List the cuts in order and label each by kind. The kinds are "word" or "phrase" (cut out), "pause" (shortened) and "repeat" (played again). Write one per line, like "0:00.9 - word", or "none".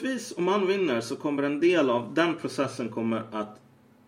none